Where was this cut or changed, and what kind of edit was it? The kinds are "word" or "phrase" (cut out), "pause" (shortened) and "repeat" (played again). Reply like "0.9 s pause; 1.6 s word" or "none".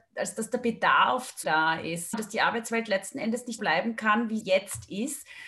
1.4 s word; 2.1 s word; 3.6 s word; 4.4 s word